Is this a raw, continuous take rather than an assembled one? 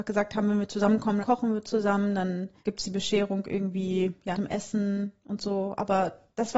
no; 3 cuts; at 1.2 s, 2.6 s, 4.3 s

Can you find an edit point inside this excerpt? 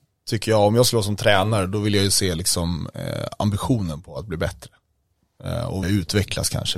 yes; 1 cut; at 5.8 s

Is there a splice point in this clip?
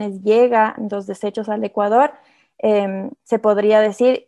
no; 0 cuts

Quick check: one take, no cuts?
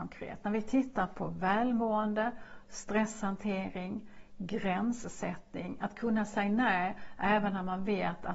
yes; 0 cuts

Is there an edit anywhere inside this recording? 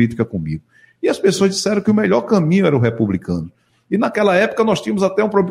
no; 0 cuts

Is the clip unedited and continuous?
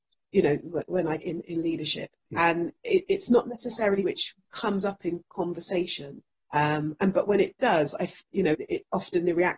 no; 6 cuts; at 1.2 s, 2.2 s, 4.0 s, 4.4 s, 6.3 s, 8.5 s

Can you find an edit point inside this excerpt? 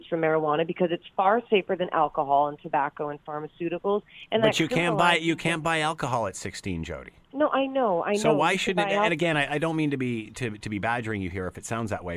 yes; 1 cut; at 7.2 s

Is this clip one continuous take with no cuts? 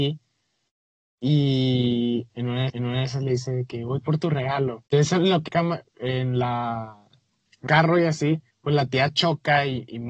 no; 6 cuts; at 2.7 s, 4.9 s, 5.5 s, 5.9 s, 7.7 s, 8.5 s

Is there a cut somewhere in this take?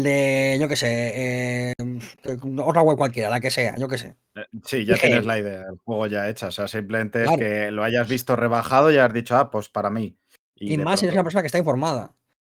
yes; 2 cuts; at 2.1 s, 10.4 s

